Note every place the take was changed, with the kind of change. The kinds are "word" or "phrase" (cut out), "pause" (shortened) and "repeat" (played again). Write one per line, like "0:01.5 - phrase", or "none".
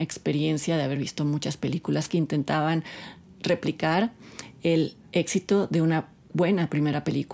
0:02.1 - word